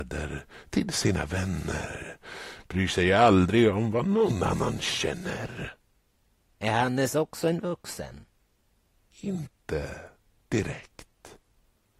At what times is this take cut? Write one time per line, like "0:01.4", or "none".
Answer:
none